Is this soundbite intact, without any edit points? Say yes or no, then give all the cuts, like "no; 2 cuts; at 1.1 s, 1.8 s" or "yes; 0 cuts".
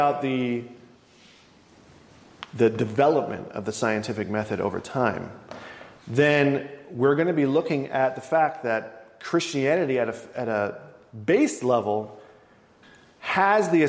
yes; 0 cuts